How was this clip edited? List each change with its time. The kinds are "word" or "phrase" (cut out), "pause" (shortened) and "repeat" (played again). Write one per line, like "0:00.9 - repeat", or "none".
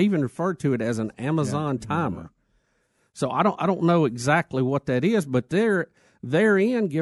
none